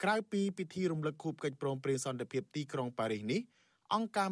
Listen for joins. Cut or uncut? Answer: uncut